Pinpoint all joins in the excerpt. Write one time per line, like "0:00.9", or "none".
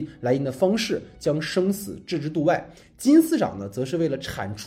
none